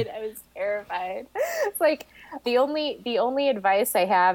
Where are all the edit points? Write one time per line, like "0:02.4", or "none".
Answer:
0:02.4